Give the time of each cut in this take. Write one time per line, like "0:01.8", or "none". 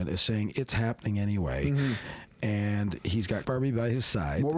0:03.4